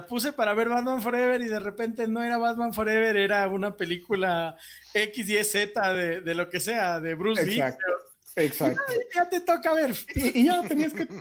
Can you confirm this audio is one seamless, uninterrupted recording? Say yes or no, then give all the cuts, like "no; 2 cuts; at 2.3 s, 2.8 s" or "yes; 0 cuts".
yes; 0 cuts